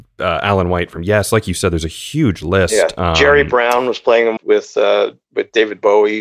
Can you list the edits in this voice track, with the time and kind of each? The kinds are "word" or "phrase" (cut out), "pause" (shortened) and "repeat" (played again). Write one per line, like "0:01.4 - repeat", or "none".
0:04.4 - word